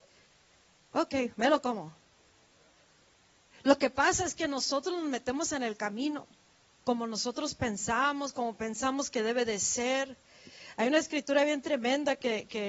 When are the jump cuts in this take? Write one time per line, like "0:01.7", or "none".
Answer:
0:01.3